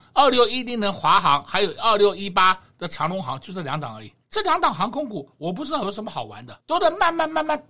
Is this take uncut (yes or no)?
no